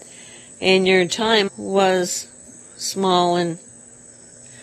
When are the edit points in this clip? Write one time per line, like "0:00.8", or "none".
0:01.5